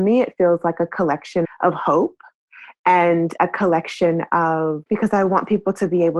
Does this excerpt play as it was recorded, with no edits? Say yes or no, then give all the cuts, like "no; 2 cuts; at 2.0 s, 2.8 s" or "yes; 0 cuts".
no; 2 cuts; at 1.4 s, 4.9 s